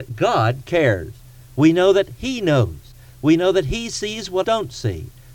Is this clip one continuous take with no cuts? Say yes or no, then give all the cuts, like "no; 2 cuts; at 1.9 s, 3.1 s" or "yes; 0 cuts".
no; 1 cut; at 4.4 s